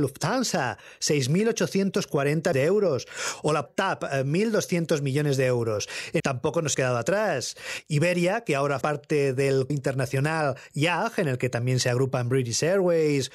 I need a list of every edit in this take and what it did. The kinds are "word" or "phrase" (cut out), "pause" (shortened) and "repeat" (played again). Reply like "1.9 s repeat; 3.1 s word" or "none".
2.5 s word; 3.7 s word; 6.2 s word; 6.7 s word; 8.8 s word; 9.7 s word